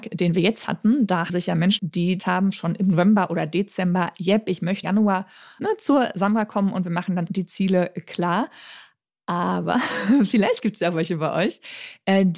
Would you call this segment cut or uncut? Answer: cut